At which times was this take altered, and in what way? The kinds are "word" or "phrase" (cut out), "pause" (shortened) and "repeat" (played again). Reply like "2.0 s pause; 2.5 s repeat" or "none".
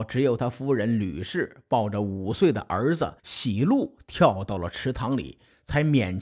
3.2 s pause